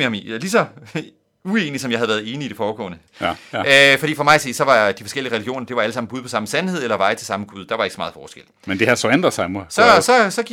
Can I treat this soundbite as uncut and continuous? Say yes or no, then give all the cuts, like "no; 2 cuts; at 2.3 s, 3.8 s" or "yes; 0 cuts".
yes; 0 cuts